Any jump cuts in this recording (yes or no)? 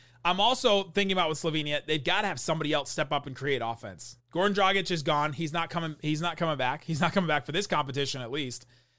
yes